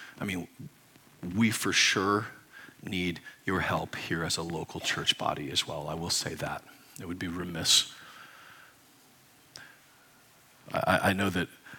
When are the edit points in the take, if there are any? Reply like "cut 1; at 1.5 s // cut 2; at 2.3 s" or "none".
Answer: none